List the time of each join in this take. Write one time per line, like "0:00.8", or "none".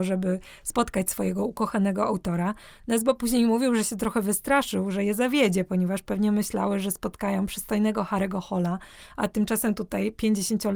none